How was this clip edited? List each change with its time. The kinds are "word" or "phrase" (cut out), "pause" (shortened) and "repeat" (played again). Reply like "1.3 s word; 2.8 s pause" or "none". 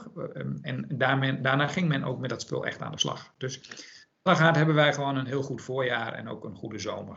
4.3 s word